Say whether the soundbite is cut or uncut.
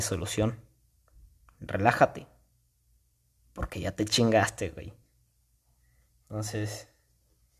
uncut